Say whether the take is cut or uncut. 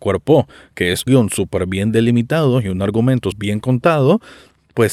cut